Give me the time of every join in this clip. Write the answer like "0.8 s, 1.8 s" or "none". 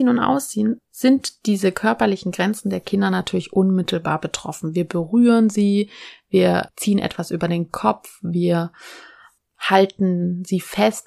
none